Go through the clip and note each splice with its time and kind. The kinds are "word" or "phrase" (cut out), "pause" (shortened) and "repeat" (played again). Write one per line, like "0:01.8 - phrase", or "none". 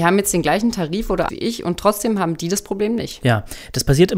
0:01.3 - word